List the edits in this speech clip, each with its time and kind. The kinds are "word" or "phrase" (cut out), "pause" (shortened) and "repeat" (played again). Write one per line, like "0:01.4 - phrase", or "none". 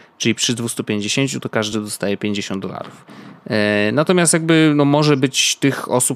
none